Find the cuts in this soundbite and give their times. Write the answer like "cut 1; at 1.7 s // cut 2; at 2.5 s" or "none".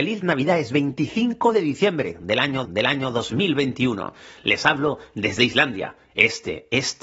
cut 1; at 2.6 s